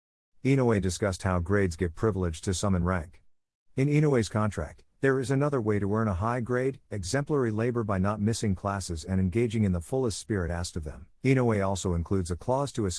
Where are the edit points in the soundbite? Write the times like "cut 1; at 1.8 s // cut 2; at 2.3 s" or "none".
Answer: cut 1; at 11.1 s